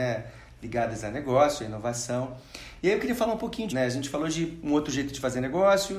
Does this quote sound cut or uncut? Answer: cut